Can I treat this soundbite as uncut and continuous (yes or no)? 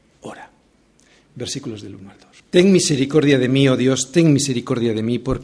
no